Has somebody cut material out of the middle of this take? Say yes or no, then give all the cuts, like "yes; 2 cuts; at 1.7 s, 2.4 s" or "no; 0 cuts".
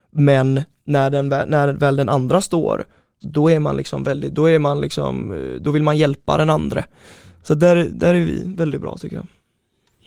no; 0 cuts